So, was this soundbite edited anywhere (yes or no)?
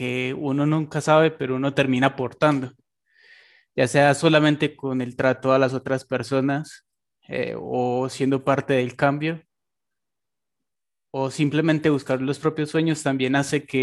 no